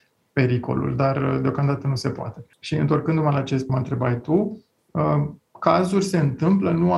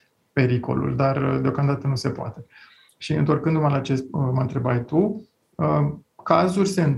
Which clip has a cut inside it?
first; 2 cuts; at 2.5 s, 3.7 s

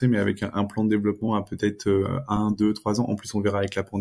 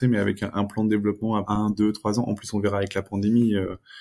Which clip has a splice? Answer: second; 1 cut; at 1.4 s

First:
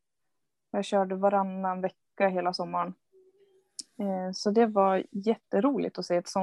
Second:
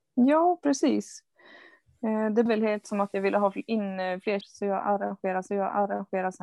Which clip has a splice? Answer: second; 4 cuts; at 2.5 s, 2.8 s, 4.4 s, 5.5 s

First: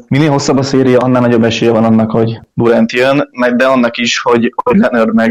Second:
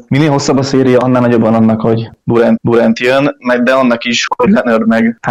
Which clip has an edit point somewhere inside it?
second; 3 cuts; at 1.4 s, 2.6 s, 4.3 s

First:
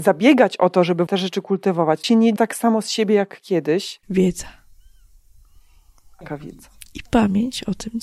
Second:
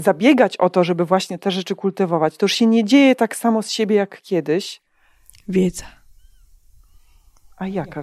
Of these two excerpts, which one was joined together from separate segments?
first; 5 cuts; at 1.1 s, 2.0 s, 2.4 s, 4.0 s, 6.2 s

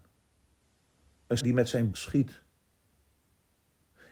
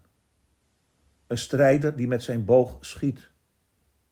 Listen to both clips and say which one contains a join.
first; 2 cuts; at 1.4 s, 1.9 s

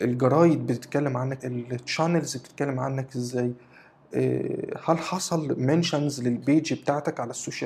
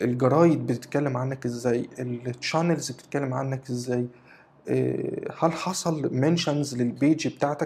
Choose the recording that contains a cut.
first; 1 cut; at 1.4 s

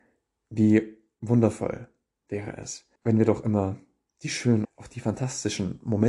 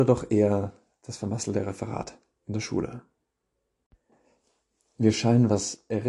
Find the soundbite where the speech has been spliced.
first; 2 cuts; at 3.0 s, 4.6 s

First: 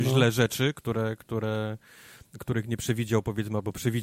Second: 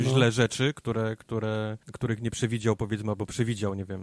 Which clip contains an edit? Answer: second; 1 cut; at 1.8 s

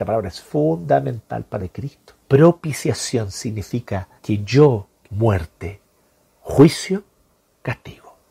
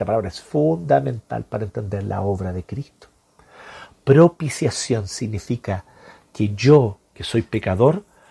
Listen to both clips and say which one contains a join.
first; 4 cuts; at 1.6 s, 2.2 s, 4.2 s, 5.0 s

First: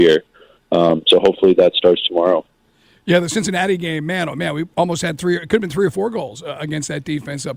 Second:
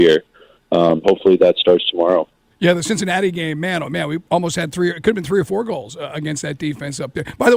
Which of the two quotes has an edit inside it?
second; 2 cuts; at 1.0 s, 2.5 s

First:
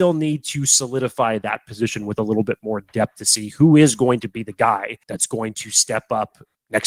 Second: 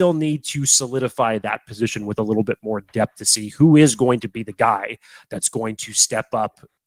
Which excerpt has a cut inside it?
first; 1 cut; at 5.0 s

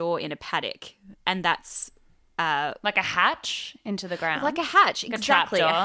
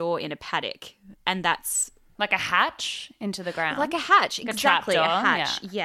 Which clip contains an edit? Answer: second; 1 cut; at 2.2 s

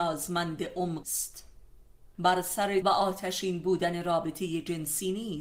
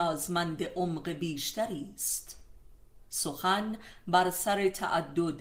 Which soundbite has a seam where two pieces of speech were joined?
first; 3 cuts; at 1.0 s, 2.1 s, 2.8 s

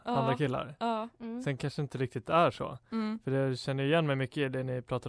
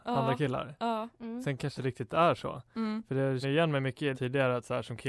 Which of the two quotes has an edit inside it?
second; 3 cuts; at 1.8 s, 3.4 s, 4.1 s

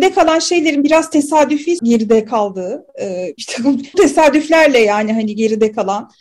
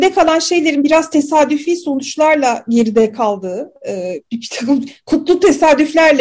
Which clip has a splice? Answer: first; 3 cuts; at 1.8 s, 3.4 s, 3.9 s

